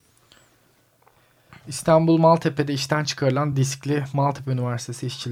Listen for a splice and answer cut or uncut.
uncut